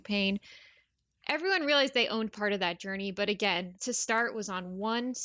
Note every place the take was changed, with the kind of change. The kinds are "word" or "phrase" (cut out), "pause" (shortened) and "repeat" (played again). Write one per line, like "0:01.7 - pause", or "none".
0:03.8 - word